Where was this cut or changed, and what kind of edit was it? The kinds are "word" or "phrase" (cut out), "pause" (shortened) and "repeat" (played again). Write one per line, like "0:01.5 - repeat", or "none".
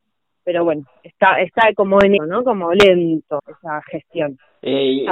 0:02.2 - word
0:03.4 - word